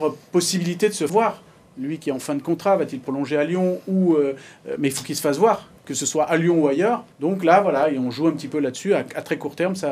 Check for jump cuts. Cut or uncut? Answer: cut